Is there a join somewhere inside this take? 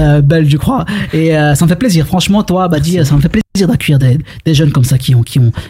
no; 0 cuts

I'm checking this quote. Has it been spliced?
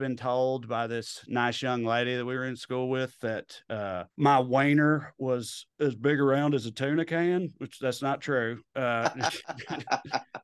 yes; 2 cuts; at 4.1 s, 5.7 s

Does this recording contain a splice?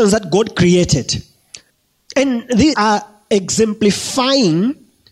yes; 2 cuts; at 1.7 s, 2.7 s

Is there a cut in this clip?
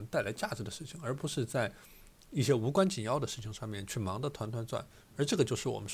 no; 0 cuts

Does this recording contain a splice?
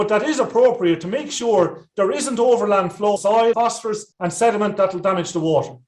yes; 3 cuts; at 3.2 s, 3.5 s, 4.1 s

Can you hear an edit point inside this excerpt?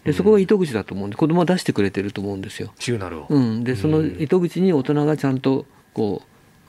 no; 0 cuts

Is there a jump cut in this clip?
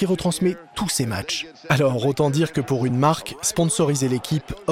no; 0 cuts

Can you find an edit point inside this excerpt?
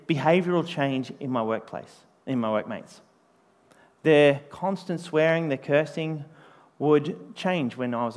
no; 0 cuts

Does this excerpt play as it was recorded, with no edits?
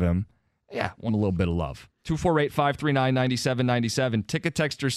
no; 2 cuts; at 1.1 s, 2.0 s

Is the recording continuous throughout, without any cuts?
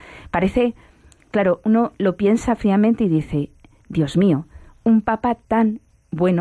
yes; 0 cuts

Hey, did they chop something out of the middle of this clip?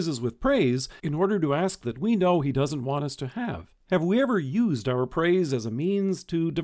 yes; 3 cuts; at 1.0 s, 1.8 s, 3.8 s

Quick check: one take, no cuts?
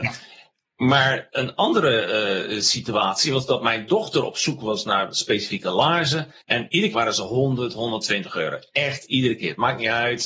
no; 2 cuts; at 6.4 s, 6.9 s

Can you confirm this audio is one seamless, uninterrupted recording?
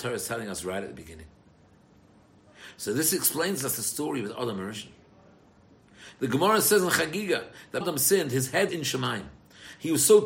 no; 2 cuts; at 7.8 s, 8.7 s

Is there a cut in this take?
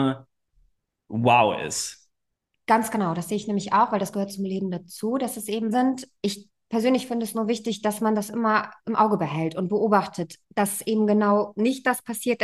yes; 1 cut; at 5.7 s

